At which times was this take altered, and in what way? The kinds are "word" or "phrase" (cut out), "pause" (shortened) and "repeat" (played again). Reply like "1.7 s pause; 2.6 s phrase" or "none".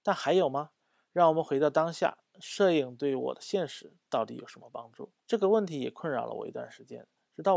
5.2 s pause